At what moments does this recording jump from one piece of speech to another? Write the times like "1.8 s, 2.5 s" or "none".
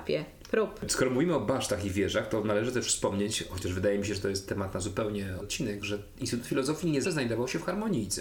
5.4 s, 7.0 s